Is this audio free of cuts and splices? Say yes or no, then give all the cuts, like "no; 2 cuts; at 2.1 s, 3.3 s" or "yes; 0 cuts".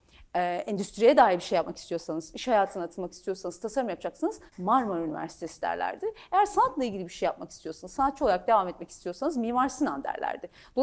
no; 1 cut; at 4.5 s